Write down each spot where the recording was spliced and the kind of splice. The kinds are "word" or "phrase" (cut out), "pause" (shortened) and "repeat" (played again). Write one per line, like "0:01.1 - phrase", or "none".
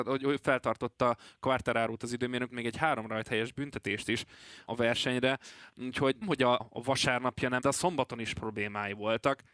0:02.5 - word
0:04.7 - word
0:06.2 - word
0:06.6 - word
0:07.6 - word
0:08.3 - word